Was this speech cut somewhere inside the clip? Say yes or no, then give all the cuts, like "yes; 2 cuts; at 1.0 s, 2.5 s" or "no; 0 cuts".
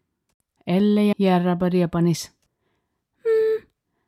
yes; 1 cut; at 1.1 s